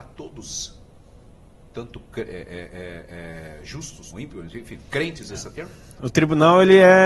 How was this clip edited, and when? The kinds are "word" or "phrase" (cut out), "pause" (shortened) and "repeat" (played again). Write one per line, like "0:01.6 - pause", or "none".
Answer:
0:04.1 - word
0:05.3 - phrase